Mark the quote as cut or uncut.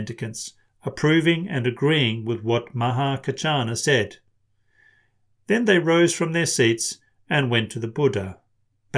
uncut